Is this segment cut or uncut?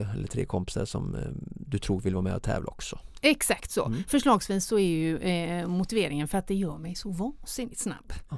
uncut